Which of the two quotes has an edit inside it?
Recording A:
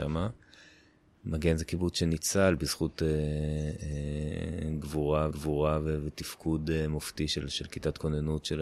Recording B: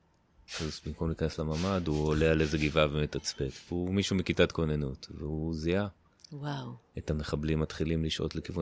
A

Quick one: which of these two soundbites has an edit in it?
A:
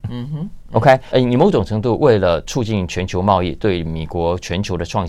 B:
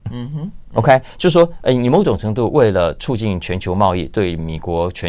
A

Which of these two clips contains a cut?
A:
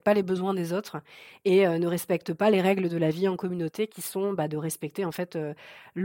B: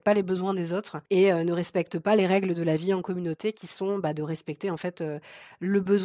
B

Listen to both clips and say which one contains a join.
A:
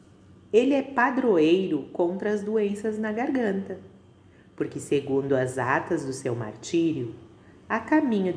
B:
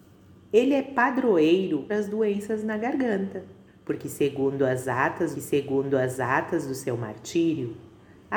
B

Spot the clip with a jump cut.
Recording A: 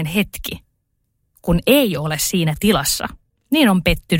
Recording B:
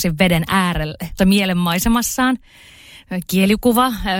B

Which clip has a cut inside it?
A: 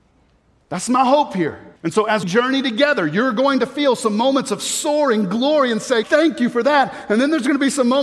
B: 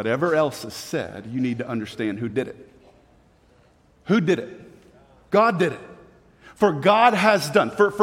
A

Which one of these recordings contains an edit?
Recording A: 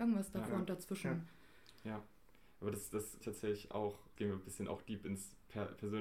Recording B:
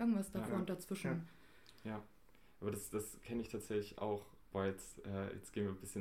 A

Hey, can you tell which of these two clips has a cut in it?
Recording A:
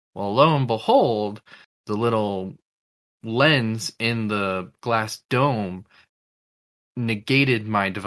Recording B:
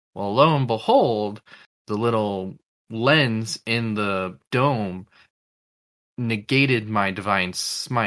B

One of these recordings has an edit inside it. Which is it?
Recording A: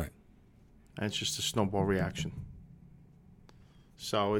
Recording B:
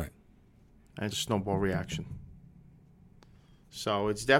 B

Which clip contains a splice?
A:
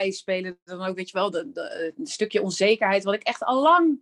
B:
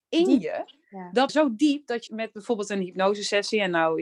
B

